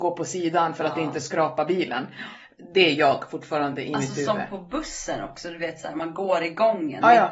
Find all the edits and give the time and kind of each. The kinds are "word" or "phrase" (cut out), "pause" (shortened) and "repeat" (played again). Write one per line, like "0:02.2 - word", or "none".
none